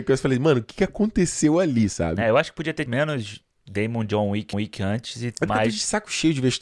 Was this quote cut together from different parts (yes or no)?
yes